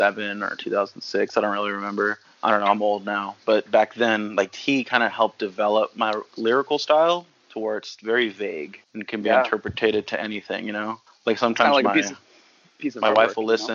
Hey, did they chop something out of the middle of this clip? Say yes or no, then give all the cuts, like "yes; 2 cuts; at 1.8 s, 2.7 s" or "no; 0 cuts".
yes; 3 cuts; at 2.2 s, 8.8 s, 11.1 s